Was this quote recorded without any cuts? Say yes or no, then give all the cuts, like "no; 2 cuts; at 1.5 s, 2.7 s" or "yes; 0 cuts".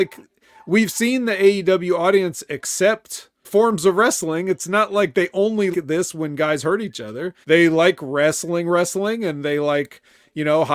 no; 3 cuts; at 3.4 s, 5.7 s, 7.4 s